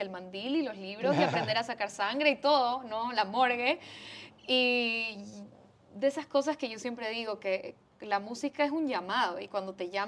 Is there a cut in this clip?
no; 0 cuts

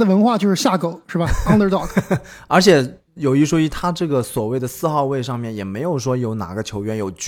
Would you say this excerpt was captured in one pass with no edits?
yes; 0 cuts

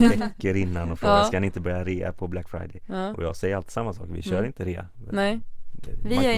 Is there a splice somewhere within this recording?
no; 0 cuts

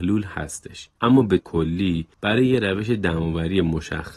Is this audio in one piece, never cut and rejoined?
no; 3 cuts; at 1.0 s, 1.4 s, 2.1 s

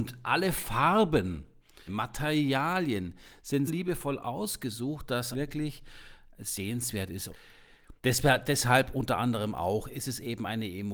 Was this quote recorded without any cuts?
no; 5 cuts; at 1.9 s, 3.7 s, 5.3 s, 7.3 s, 8.0 s

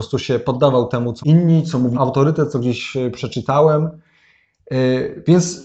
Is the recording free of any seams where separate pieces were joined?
no; 2 cuts; at 1.2 s, 1.9 s

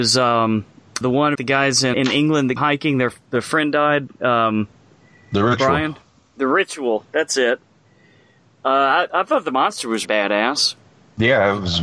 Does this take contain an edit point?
yes; 6 cuts; at 1.0 s, 1.3 s, 1.9 s, 2.6 s, 9.1 s, 10.0 s

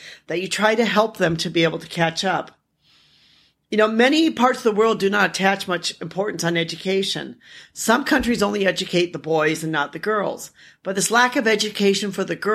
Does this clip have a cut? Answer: no; 0 cuts

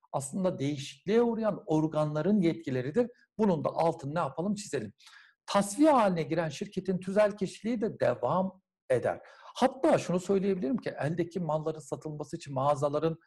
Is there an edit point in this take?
no; 0 cuts

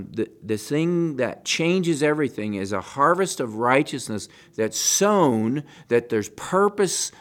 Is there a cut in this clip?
no; 0 cuts

